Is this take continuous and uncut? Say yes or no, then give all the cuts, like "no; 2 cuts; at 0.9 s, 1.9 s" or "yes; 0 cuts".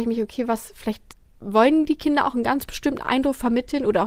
no; 1 cut; at 1.1 s